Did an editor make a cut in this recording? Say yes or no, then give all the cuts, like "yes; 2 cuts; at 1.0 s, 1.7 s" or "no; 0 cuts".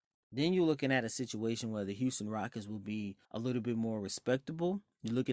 yes; 1 cut; at 3.2 s